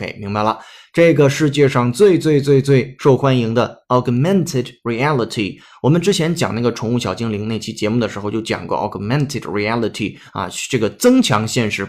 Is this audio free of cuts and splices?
yes; 0 cuts

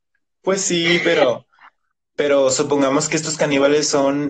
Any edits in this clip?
no; 0 cuts

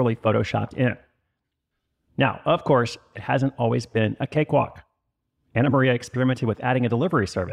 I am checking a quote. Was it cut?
no; 0 cuts

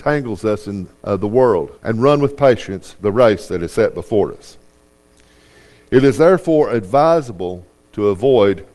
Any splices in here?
yes; 2 cuts; at 1.0 s, 1.8 s

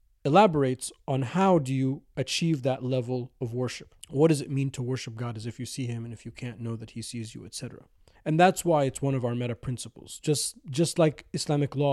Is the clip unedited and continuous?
no; 2 cuts; at 4.0 s, 8.1 s

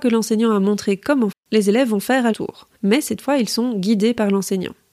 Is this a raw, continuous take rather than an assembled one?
no; 3 cuts; at 1.3 s, 2.3 s, 2.7 s

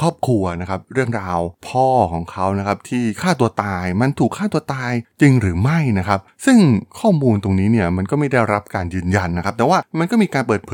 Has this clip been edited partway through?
yes; 1 cut; at 1.6 s

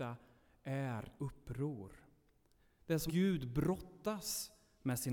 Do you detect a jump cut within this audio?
yes; 2 cuts; at 1.2 s, 3.1 s

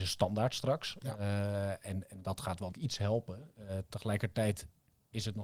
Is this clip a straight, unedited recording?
no; 1 cut; at 2.7 s

